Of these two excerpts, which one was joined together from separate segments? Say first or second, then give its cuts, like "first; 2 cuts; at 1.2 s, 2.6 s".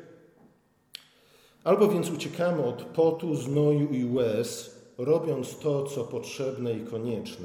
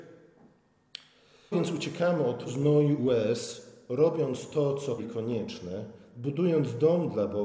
second; 4 cuts; at 1.5 s, 2.5 s, 3.0 s, 5.0 s